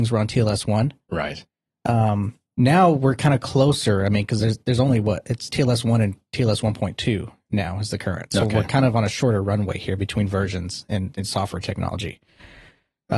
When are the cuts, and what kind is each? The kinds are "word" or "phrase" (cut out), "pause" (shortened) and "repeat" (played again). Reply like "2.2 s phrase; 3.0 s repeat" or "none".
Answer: none